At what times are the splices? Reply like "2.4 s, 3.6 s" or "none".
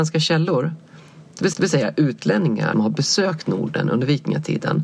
1.5 s, 2.7 s